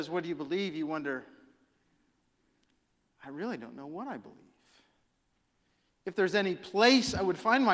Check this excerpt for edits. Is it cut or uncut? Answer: uncut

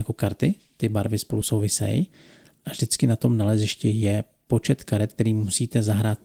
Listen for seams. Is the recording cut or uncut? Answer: uncut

